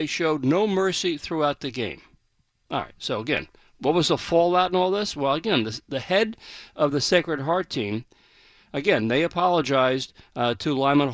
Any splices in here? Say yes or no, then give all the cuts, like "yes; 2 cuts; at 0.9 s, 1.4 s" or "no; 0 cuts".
no; 0 cuts